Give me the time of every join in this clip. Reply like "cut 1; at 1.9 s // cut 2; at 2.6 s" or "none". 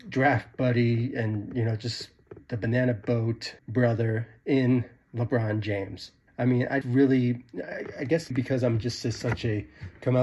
cut 1; at 3.6 s // cut 2; at 6.3 s // cut 3; at 6.8 s // cut 4; at 8.3 s